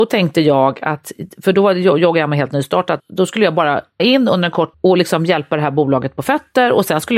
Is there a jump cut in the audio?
yes; 3 cuts; at 3.0 s, 4.0 s, 4.7 s

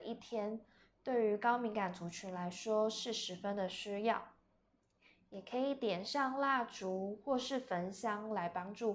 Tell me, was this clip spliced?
no; 0 cuts

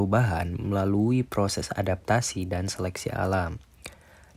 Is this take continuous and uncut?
yes; 0 cuts

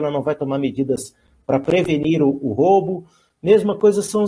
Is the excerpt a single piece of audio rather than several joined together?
yes; 0 cuts

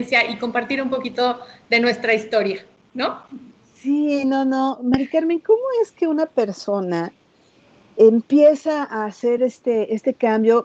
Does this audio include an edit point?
no; 0 cuts

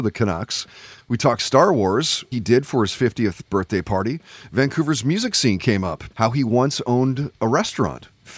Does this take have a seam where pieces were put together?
yes; 2 cuts; at 2.3 s, 6.1 s

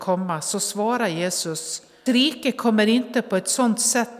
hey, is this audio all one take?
no; 1 cut; at 2.1 s

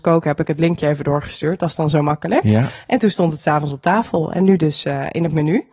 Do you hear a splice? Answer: no; 0 cuts

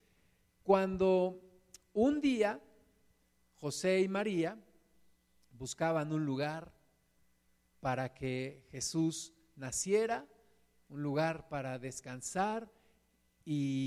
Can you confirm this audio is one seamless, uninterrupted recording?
yes; 0 cuts

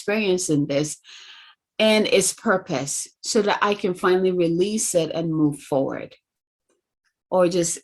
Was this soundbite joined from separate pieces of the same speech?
no; 0 cuts

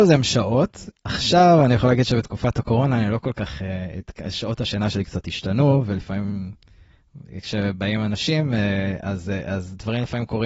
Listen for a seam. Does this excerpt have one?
no; 0 cuts

